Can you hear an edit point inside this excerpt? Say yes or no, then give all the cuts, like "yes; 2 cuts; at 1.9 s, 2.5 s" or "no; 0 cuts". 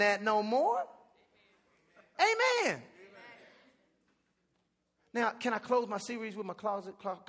no; 0 cuts